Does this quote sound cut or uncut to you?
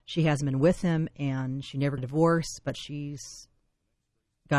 cut